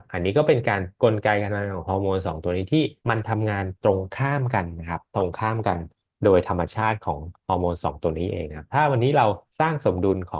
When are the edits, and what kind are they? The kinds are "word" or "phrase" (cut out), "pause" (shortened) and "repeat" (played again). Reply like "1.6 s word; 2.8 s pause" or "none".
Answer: 3.0 s pause; 9.5 s pause